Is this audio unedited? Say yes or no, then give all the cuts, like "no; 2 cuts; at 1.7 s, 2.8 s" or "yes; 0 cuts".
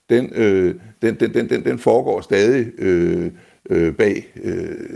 yes; 0 cuts